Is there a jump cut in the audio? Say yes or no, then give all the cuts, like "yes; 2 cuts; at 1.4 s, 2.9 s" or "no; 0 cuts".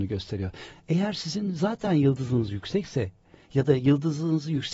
no; 0 cuts